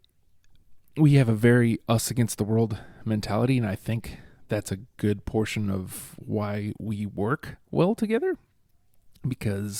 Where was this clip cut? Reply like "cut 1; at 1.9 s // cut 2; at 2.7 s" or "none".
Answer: none